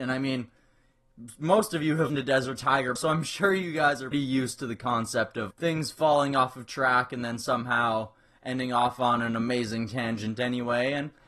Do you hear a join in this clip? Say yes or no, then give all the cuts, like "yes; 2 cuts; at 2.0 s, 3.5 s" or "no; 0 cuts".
yes; 4 cuts; at 2.1 s, 3.0 s, 4.1 s, 5.5 s